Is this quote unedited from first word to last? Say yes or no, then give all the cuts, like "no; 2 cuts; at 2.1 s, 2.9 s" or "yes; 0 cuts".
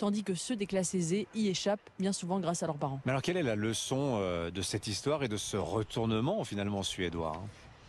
yes; 0 cuts